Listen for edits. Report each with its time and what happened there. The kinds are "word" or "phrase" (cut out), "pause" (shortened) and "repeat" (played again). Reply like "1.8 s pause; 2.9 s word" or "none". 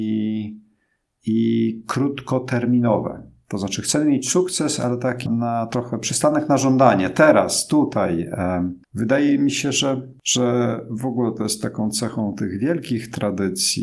5.3 s word; 8.8 s pause